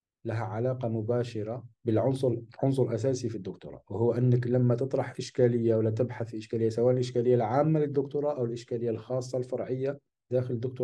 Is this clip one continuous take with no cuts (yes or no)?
no